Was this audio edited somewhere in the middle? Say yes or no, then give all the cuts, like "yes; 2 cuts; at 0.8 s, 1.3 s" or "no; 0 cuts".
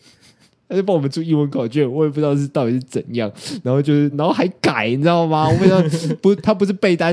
yes; 1 cut; at 4.1 s